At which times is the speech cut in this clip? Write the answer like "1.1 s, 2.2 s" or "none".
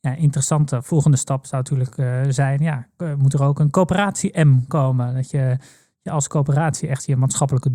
none